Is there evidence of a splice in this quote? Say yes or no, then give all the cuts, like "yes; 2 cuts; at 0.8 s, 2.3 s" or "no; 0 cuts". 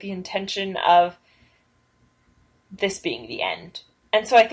no; 0 cuts